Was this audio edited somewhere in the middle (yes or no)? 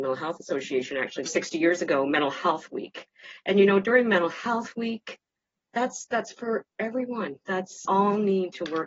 yes